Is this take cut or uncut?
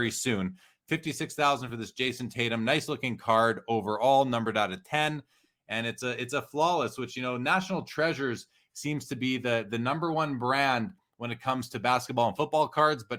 uncut